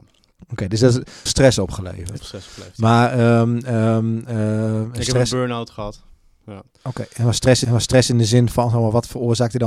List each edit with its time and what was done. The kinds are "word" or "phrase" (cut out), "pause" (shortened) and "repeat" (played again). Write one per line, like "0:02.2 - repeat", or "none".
0:01.3 - phrase
0:02.2 - word
0:07.6 - repeat